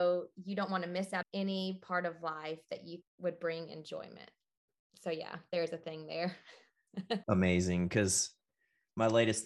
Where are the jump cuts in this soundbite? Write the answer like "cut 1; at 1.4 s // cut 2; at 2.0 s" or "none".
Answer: cut 1; at 1.2 s // cut 2; at 3.0 s // cut 3; at 7.2 s